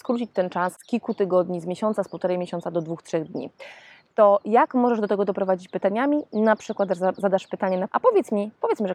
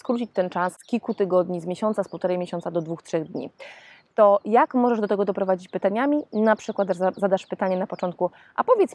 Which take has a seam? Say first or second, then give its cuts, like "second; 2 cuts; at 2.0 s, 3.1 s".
first; 1 cut; at 7.9 s